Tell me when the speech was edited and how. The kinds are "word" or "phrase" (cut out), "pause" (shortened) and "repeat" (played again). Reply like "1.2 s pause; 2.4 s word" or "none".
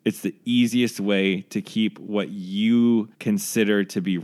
3.1 s pause